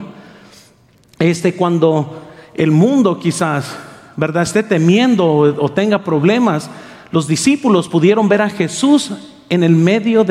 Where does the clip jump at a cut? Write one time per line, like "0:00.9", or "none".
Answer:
none